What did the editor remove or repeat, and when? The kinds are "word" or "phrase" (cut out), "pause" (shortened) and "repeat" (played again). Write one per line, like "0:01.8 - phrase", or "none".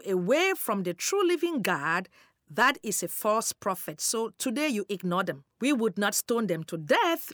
0:05.5 - pause